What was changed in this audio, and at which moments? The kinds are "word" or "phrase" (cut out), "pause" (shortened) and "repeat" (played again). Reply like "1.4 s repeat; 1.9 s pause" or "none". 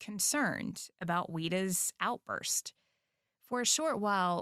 none